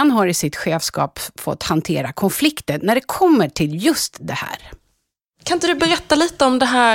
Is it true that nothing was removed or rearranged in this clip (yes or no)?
yes